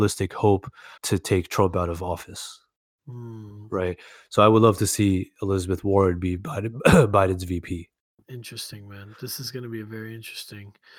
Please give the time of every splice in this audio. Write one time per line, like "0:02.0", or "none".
0:01.0
0:08.1